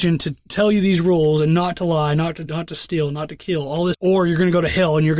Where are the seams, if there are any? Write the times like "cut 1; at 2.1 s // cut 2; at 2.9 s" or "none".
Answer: cut 1; at 2.5 s // cut 2; at 3.9 s